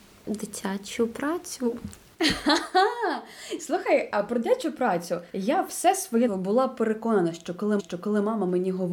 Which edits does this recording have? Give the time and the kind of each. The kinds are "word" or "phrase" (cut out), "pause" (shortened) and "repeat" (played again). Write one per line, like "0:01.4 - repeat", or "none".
0:05.3 - pause
0:06.3 - word
0:07.8 - repeat